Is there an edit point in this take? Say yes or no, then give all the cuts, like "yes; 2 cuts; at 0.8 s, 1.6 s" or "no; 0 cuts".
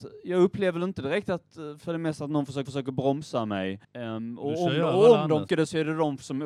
yes; 3 cuts; at 2.7 s, 3.8 s, 5.5 s